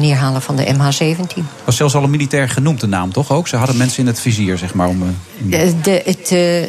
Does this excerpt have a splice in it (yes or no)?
no